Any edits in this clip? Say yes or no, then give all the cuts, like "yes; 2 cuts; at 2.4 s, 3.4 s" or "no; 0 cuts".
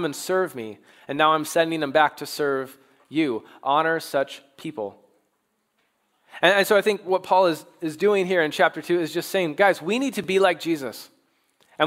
no; 0 cuts